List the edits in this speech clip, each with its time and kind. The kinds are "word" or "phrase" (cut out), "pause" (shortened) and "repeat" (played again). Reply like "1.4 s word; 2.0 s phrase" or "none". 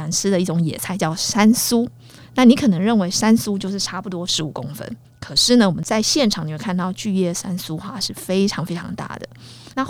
5.0 s pause